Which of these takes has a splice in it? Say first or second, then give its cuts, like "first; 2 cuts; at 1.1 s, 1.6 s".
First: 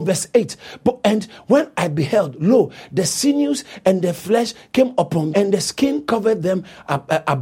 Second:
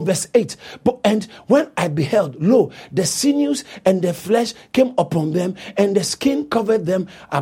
first; 1 cut; at 5.3 s